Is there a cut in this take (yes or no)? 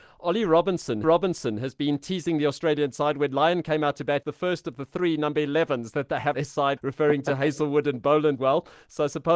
yes